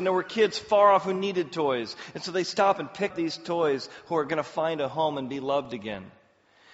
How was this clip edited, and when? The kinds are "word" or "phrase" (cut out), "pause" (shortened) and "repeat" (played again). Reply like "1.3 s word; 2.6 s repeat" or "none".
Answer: 3.1 s word